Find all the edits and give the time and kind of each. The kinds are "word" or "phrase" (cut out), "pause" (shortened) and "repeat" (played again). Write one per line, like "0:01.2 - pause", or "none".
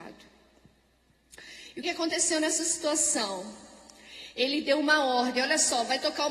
0:01.8 - word